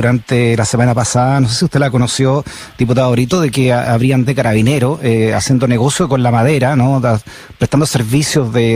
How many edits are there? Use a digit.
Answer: 1